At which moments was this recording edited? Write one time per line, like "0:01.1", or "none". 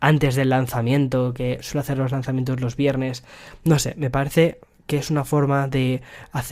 none